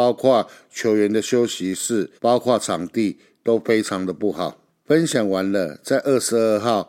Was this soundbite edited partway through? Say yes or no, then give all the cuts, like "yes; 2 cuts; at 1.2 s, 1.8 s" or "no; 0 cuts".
yes; 2 cuts; at 2.2 s, 4.7 s